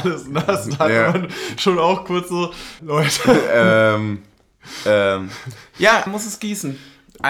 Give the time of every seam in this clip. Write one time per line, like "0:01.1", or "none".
0:02.8
0:06.1